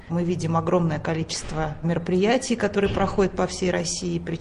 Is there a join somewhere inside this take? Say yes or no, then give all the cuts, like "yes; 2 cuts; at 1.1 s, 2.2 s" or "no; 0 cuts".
no; 0 cuts